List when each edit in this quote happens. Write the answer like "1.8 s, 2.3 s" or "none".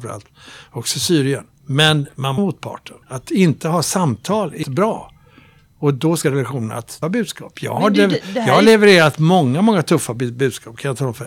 1.5 s, 2.4 s, 3.0 s, 4.6 s, 6.2 s, 7.0 s